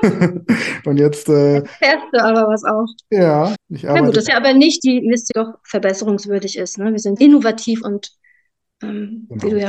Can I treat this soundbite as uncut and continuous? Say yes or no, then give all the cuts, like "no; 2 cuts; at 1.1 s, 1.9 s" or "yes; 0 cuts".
no; 6 cuts; at 3.5 s, 4.3 s, 4.8 s, 5.3 s, 7.2 s, 7.8 s